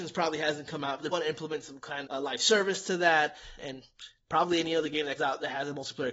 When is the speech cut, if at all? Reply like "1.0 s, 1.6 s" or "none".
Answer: 1.1 s, 2.0 s, 3.6 s, 5.2 s